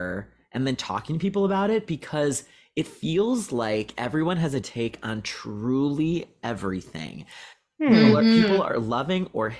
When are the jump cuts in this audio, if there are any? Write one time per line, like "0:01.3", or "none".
0:04.6